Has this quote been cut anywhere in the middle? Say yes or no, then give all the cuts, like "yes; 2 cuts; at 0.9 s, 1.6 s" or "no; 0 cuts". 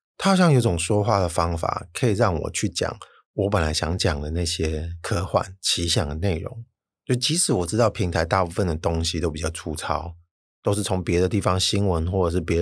no; 0 cuts